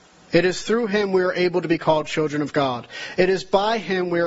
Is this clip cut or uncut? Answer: uncut